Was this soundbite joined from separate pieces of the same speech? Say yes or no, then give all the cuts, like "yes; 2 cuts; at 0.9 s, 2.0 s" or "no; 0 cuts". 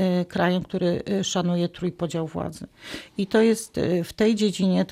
no; 0 cuts